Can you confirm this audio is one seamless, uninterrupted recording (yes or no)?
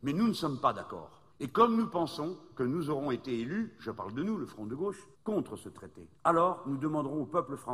no